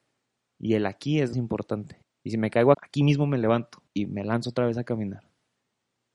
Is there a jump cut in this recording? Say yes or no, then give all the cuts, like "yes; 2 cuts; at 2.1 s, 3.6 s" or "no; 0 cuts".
yes; 3 cuts; at 1.3 s, 2.7 s, 3.9 s